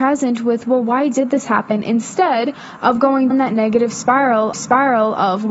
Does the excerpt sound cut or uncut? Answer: cut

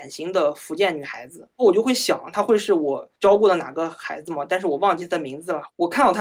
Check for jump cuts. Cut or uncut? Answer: cut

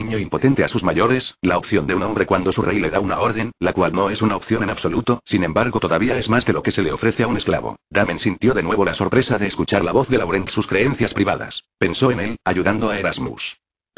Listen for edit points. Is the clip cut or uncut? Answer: cut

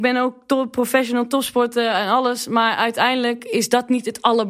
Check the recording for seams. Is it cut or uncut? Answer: uncut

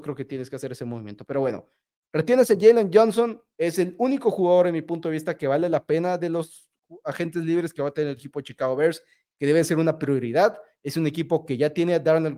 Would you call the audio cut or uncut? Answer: uncut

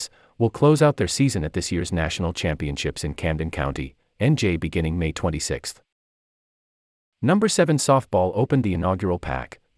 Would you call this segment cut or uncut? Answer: uncut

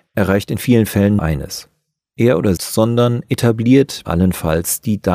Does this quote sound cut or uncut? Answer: cut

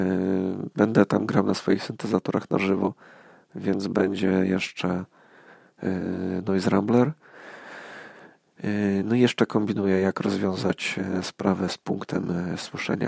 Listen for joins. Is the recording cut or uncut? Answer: uncut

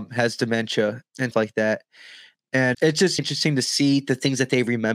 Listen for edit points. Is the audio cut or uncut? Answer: cut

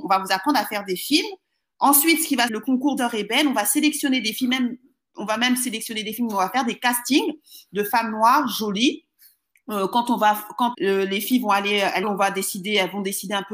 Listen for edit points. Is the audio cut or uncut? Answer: cut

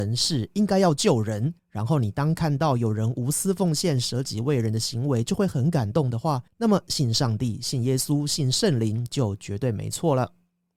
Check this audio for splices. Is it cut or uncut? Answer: cut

